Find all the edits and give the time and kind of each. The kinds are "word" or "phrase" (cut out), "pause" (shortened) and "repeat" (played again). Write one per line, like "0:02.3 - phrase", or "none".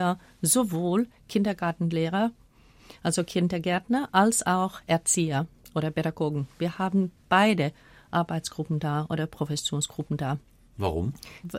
none